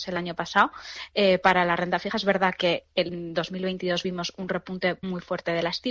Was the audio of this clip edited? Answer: no; 0 cuts

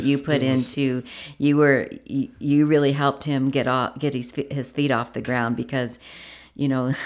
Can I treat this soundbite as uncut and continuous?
yes; 0 cuts

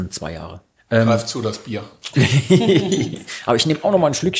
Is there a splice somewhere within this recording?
no; 0 cuts

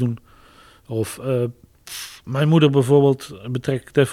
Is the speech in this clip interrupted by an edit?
no; 0 cuts

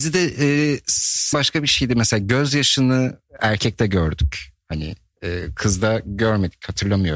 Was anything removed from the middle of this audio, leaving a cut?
yes; 1 cut; at 1.3 s

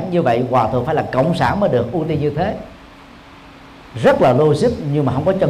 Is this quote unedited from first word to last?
yes; 0 cuts

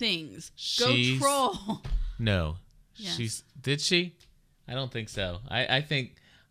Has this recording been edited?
no; 0 cuts

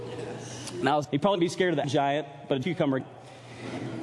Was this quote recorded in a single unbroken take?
no; 5 cuts; at 1.0 s, 1.3 s, 1.8 s, 2.6 s, 3.0 s

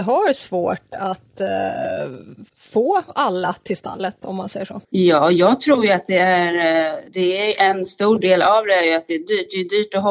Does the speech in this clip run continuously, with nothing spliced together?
no; 3 cuts; at 2.5 s, 4.8 s, 7.1 s

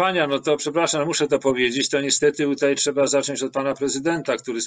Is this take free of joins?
yes; 0 cuts

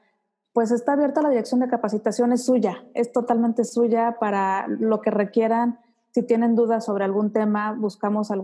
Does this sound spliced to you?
no; 0 cuts

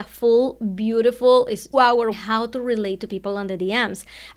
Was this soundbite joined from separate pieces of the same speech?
yes; 2 cuts; at 1.7 s, 2.1 s

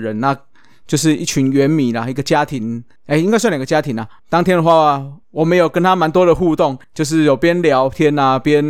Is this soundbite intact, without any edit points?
no; 3 cuts; at 4.2 s, 5.2 s, 6.8 s

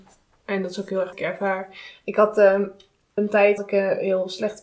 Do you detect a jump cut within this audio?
yes; 3 cuts; at 1.1 s, 3.2 s, 3.6 s

